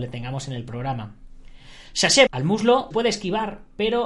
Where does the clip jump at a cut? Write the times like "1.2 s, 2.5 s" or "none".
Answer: 2.3 s, 2.9 s